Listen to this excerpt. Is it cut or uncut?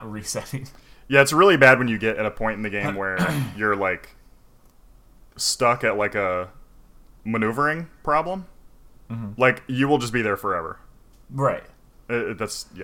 uncut